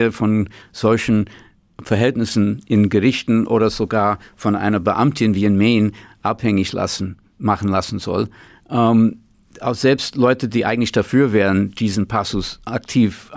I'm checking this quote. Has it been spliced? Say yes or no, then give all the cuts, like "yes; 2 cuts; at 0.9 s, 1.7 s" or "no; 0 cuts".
no; 0 cuts